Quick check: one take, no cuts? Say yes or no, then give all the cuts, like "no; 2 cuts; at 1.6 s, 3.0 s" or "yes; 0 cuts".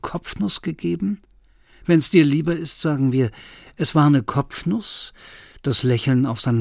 yes; 0 cuts